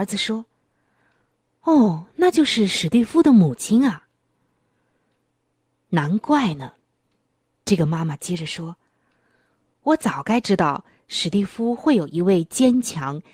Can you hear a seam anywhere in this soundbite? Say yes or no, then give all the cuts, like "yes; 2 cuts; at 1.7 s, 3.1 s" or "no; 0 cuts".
no; 0 cuts